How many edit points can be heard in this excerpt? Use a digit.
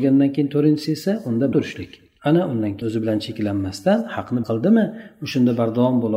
3